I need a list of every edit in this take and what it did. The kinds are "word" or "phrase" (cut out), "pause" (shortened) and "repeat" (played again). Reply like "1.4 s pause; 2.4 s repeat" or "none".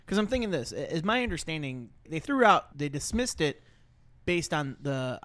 2.1 s word; 2.7 s word